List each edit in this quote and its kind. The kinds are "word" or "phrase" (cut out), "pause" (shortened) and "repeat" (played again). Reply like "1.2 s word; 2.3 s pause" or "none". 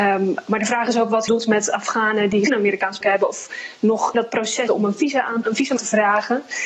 1.3 s word; 2.5 s word; 3.0 s word; 4.1 s word; 4.7 s word; 5.4 s word; 5.8 s word